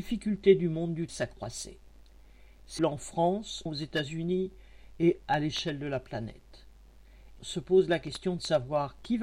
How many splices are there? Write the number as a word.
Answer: five